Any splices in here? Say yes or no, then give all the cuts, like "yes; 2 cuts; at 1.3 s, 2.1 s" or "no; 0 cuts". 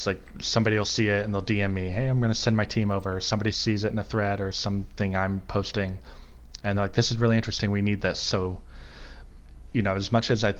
no; 0 cuts